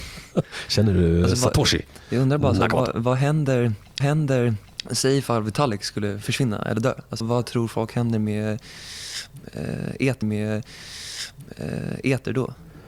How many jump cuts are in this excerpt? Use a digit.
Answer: 3